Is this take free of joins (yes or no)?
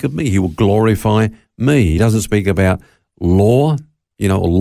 yes